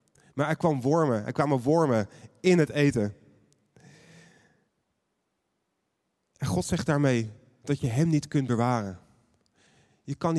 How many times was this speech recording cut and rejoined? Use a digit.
0